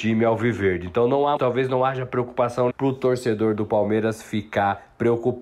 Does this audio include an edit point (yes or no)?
yes